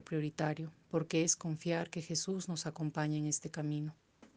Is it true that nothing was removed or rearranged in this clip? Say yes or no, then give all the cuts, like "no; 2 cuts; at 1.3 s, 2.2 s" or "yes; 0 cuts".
yes; 0 cuts